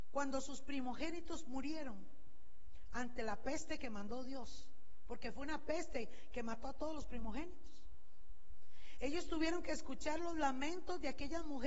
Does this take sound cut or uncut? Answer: uncut